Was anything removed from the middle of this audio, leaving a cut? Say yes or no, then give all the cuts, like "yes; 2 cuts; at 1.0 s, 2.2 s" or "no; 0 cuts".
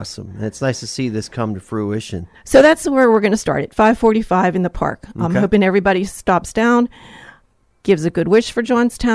no; 0 cuts